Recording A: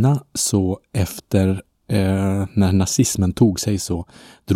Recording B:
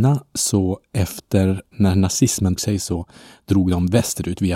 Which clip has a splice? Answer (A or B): B